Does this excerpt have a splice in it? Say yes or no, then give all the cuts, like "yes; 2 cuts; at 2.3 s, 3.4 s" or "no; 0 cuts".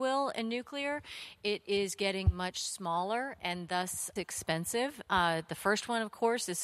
yes; 1 cut; at 4.2 s